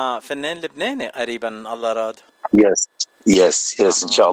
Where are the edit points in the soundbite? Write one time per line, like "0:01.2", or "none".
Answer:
none